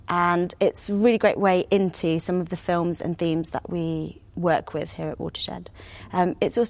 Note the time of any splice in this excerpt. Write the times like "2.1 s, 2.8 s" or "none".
4.3 s